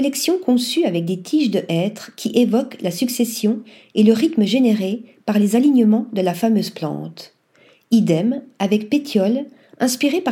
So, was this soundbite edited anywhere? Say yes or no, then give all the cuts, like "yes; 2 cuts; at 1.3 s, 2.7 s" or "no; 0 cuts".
no; 0 cuts